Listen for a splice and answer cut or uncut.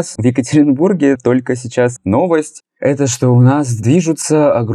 cut